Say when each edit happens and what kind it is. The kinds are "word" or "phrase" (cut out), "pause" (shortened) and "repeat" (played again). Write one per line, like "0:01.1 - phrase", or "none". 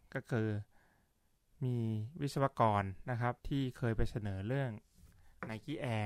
0:03.4 - pause